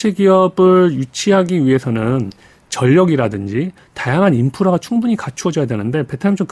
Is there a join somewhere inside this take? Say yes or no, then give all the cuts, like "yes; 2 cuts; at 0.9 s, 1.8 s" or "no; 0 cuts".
no; 0 cuts